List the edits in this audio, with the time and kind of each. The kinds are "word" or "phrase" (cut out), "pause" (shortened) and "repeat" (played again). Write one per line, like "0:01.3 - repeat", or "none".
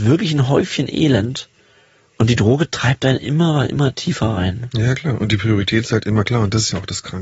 none